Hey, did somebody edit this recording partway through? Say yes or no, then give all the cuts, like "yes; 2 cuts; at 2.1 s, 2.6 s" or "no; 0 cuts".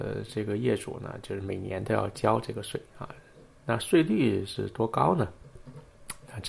yes; 1 cut; at 2.9 s